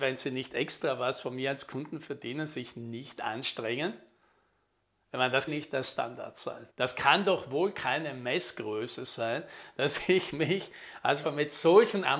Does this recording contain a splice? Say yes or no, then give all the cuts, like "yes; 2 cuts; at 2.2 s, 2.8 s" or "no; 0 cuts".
yes; 3 cuts; at 5.5 s, 6.7 s, 11.2 s